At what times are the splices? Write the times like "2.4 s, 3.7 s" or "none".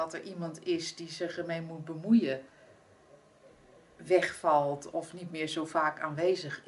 4.9 s